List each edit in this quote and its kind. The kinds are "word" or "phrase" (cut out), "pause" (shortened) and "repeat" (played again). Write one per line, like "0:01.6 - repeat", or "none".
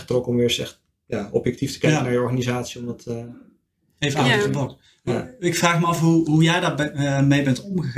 none